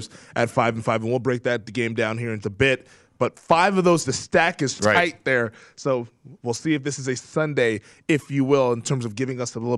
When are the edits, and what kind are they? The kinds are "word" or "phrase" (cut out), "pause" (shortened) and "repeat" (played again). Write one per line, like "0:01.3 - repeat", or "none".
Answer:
0:02.4 - word
0:04.0 - word
0:04.8 - word
0:07.2 - word